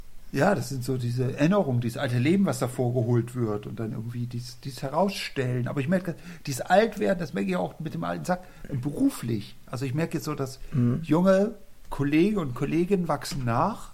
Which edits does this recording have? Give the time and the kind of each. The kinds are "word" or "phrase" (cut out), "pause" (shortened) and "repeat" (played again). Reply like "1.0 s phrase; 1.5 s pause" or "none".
none